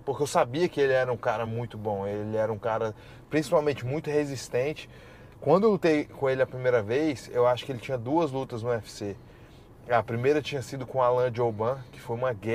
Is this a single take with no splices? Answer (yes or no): yes